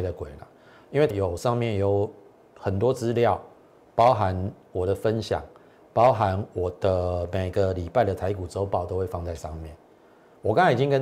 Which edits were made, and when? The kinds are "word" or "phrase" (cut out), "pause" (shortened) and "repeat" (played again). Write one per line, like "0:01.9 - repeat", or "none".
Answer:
0:01.1 - word